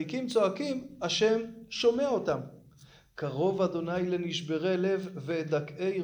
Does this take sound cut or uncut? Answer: uncut